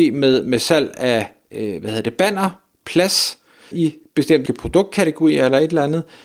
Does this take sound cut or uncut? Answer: cut